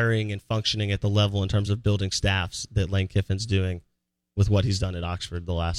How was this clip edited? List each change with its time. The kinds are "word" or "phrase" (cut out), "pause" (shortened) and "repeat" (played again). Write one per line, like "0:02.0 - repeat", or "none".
none

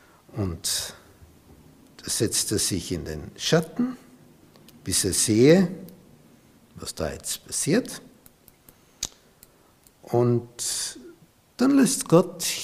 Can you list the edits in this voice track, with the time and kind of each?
none

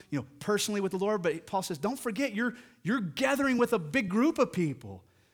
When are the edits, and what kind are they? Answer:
none

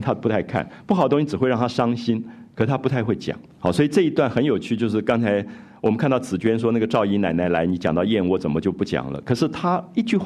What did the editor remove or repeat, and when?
0:03.5 - pause

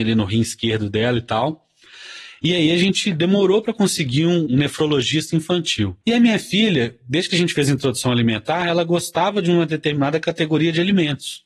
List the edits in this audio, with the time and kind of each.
0:04.5 - word
0:06.0 - pause

